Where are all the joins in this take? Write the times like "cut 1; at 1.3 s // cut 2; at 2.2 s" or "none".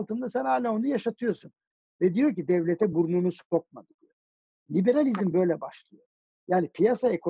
none